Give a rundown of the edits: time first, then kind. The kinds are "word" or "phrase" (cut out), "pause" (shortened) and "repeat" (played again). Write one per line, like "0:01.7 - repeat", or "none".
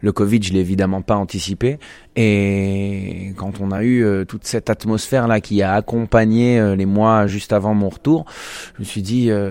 none